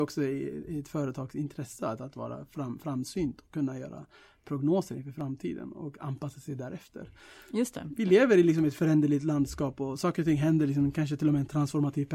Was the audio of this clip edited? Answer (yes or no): no